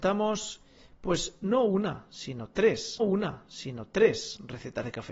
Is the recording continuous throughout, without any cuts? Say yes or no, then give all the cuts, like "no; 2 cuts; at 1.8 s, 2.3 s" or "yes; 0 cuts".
no; 1 cut; at 3.0 s